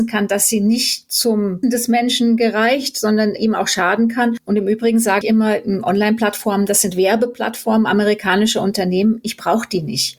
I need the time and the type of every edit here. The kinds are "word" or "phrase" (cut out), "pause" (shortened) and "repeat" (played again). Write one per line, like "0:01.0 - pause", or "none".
0:01.6 - word
0:03.4 - word
0:05.2 - word